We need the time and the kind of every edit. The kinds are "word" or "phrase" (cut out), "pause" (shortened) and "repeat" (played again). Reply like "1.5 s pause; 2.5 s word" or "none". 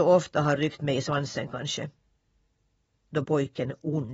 3.2 s word